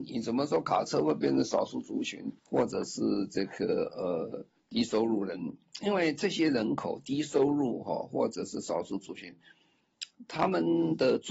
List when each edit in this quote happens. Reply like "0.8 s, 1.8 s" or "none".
2.4 s, 4.6 s

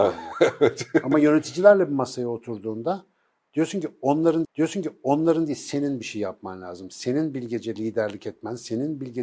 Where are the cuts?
4.4 s

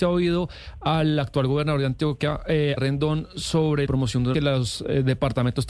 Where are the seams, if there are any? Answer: 2.8 s, 3.9 s, 4.3 s

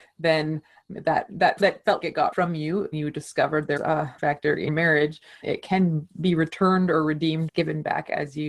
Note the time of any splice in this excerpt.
1.6 s, 2.0 s, 2.3 s, 2.9 s, 3.8 s, 4.2 s, 4.7 s, 5.4 s, 7.5 s

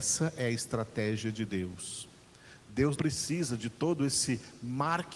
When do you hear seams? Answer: 3.0 s

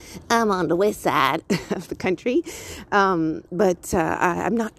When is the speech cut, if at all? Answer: 3.5 s

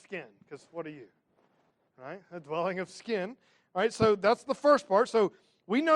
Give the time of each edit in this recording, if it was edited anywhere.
none

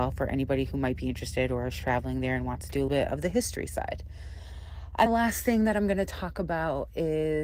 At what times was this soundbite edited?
2.9 s, 5.1 s

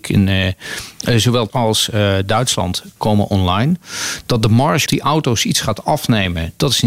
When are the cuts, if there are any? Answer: 1.5 s, 3.0 s, 4.9 s

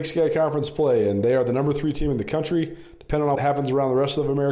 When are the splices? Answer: 3.3 s

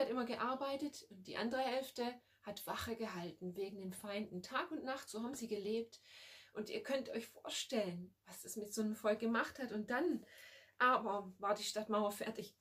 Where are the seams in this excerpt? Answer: none

